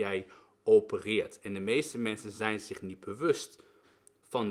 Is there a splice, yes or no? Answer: no